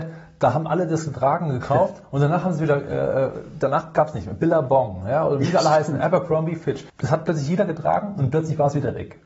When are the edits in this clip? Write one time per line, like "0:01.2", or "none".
0:06.9